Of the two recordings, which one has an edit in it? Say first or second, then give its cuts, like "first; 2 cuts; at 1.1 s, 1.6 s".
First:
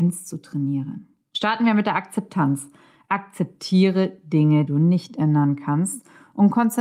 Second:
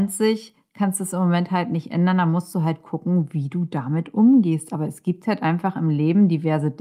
first; 1 cut; at 4.7 s